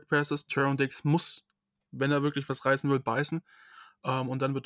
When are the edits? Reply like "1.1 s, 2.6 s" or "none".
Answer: none